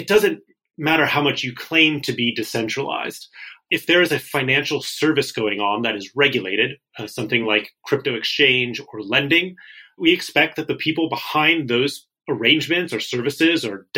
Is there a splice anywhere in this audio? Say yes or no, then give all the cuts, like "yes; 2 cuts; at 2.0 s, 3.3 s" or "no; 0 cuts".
no; 0 cuts